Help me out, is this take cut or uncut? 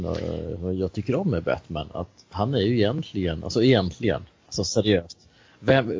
uncut